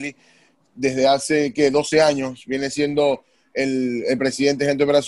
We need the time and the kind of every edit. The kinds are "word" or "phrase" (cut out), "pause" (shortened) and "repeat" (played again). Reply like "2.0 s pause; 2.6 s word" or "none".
none